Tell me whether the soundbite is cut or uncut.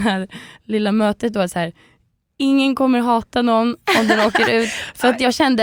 uncut